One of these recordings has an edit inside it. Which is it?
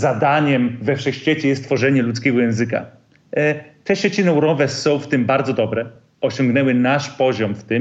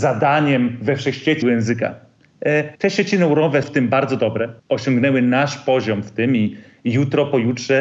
second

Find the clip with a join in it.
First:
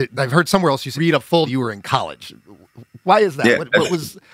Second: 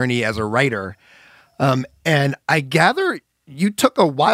first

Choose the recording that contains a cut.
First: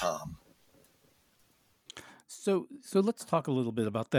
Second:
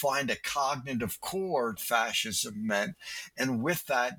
second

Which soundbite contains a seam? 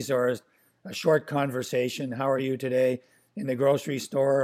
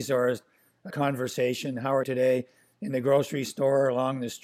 second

